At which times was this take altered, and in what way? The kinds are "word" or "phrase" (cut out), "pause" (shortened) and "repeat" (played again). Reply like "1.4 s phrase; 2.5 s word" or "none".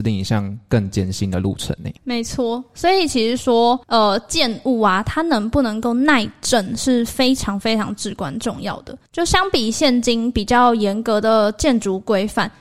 2.0 s pause; 3.8 s pause; 9.1 s pause